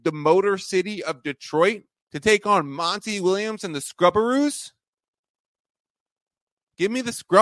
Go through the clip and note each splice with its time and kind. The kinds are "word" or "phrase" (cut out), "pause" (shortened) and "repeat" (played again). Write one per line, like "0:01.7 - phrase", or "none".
0:01.9 - pause